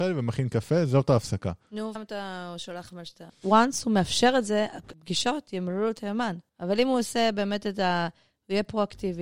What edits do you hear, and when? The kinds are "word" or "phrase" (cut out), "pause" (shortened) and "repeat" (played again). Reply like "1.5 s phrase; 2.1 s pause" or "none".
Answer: 2.0 s word; 6.5 s pause